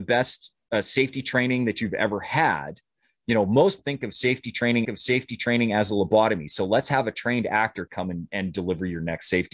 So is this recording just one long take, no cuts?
no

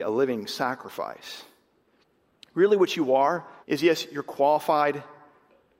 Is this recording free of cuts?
no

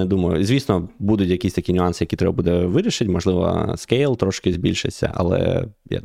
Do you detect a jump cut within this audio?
no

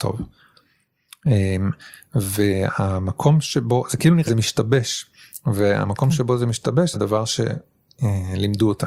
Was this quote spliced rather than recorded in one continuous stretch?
yes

